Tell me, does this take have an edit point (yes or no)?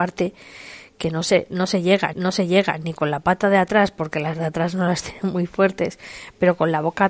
yes